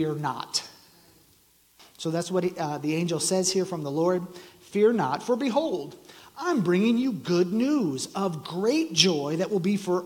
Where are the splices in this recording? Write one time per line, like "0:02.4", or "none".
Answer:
none